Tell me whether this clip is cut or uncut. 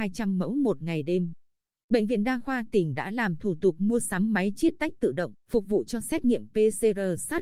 cut